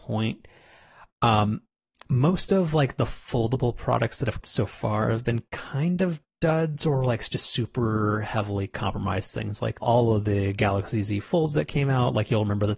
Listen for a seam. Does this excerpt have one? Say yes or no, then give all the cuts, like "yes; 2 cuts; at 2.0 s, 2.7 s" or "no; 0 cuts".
yes; 2 cuts; at 4.4 s, 9.8 s